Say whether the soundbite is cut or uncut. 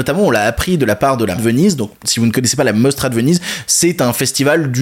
cut